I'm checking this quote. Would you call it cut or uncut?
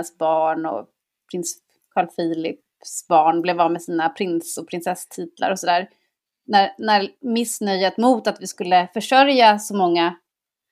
uncut